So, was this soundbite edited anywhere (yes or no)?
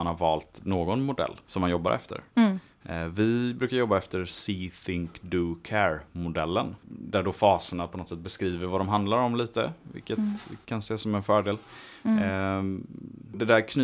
yes